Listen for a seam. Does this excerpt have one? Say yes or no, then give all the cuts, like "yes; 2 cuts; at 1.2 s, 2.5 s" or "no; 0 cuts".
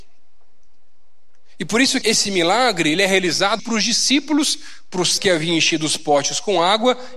yes; 3 cuts; at 2.0 s, 3.6 s, 5.2 s